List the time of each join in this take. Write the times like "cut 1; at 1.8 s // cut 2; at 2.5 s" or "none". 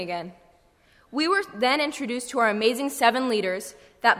none